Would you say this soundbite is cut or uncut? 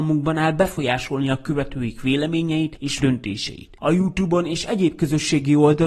cut